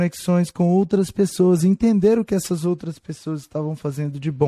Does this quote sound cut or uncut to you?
uncut